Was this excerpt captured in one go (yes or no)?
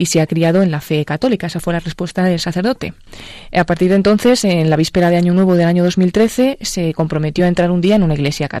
yes